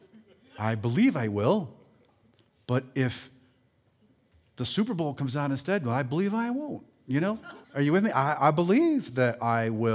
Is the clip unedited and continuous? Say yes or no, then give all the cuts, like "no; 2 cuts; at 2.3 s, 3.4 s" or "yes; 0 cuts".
no; 1 cut; at 7.6 s